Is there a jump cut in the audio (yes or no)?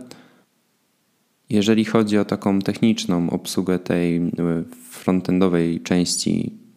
no